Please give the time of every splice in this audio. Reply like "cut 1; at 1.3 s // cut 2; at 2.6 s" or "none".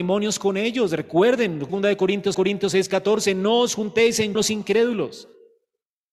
cut 1; at 1.7 s // cut 2; at 2.3 s // cut 3; at 4.4 s

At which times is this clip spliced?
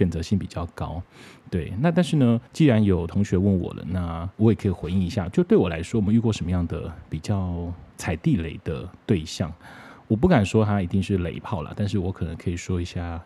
cut 1; at 2.5 s // cut 2; at 4.3 s

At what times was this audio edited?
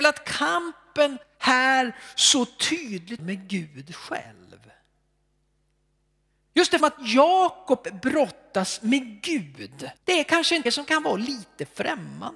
cut 1; at 1.2 s // cut 2; at 3.2 s // cut 3; at 6.8 s // cut 4; at 10.0 s // cut 5; at 10.7 s

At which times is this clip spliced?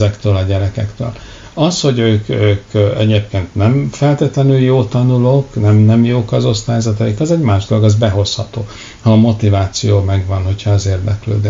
none

